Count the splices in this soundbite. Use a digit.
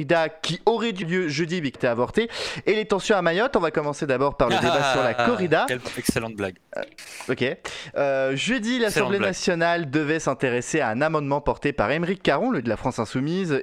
3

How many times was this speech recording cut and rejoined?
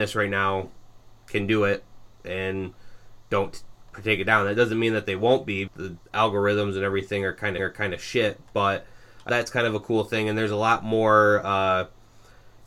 3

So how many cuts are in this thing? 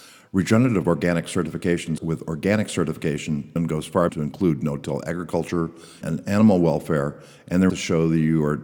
5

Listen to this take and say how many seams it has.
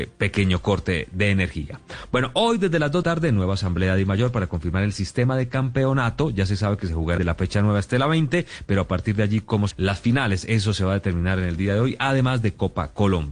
3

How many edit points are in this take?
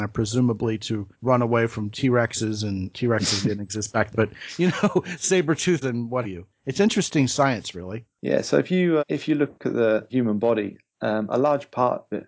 7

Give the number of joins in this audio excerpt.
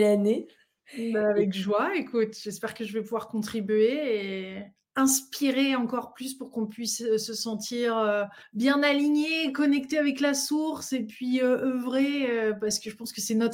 1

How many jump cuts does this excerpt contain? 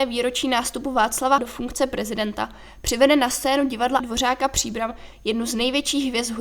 2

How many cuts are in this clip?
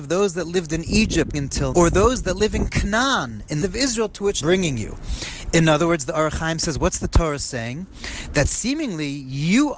4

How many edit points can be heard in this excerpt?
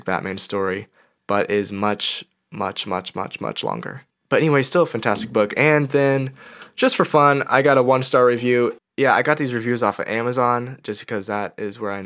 0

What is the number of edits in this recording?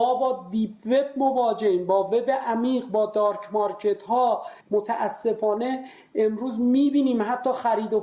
1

